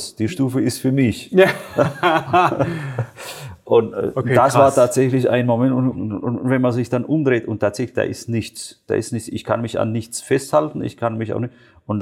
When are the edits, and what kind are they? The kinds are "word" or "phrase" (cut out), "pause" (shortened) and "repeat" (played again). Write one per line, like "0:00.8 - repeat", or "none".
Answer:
0:05.9 - word